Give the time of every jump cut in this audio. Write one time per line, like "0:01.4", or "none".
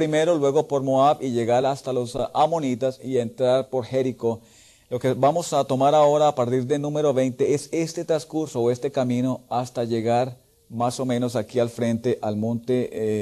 none

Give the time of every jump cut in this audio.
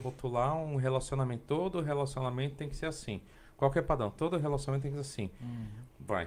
none

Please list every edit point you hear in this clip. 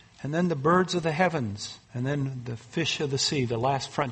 0:01.8

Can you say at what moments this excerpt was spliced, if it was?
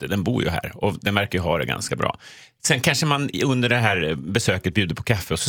none

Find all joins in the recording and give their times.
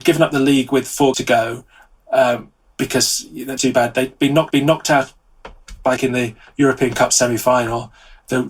0:01.1
0:02.6
0:03.6
0:04.5
0:06.0
0:06.4

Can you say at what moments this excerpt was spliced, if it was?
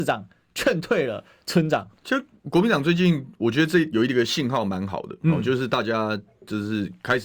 0:02.0

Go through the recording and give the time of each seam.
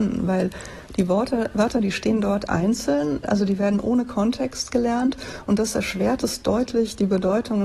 none

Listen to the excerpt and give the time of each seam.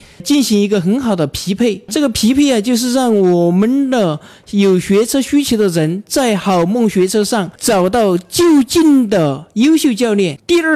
none

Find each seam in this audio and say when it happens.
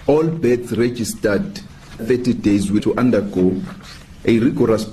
0:02.0
0:02.8

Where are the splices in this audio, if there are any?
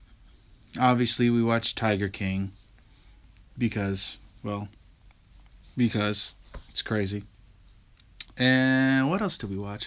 none

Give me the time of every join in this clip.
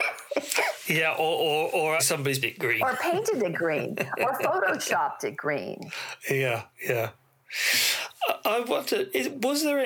0:02.0
0:02.4
0:06.7

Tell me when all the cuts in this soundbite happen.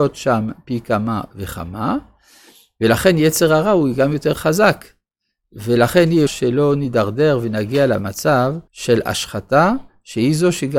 0:06.3
0:08.7

